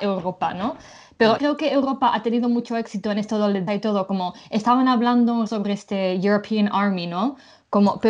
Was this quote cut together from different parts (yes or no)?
yes